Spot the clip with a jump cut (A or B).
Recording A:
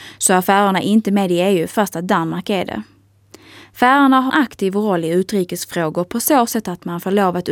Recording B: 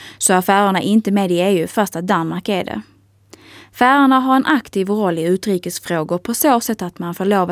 A